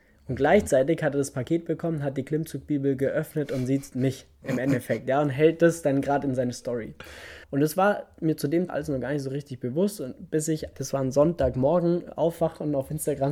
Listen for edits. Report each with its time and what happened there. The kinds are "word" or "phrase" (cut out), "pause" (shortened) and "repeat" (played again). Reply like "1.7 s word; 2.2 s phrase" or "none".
7.4 s pause; 8.7 s word; 10.7 s word